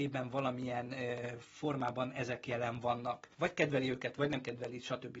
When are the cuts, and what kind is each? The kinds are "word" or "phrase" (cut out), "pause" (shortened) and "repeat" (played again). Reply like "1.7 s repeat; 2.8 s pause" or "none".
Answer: 3.3 s pause